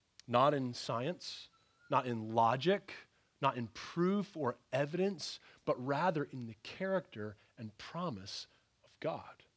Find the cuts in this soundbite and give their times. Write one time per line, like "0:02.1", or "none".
none